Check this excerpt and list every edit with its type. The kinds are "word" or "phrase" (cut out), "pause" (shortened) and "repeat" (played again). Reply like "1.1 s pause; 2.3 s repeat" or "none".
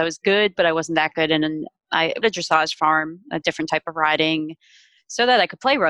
2.2 s phrase